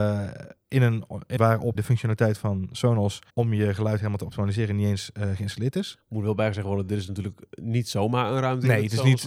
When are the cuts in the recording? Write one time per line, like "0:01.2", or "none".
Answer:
0:01.4
0:01.8
0:03.3